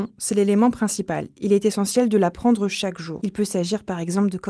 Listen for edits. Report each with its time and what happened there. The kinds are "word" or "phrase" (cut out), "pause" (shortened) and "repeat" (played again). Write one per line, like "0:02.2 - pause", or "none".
none